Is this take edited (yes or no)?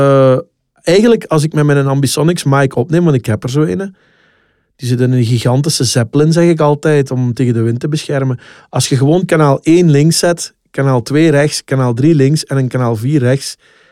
no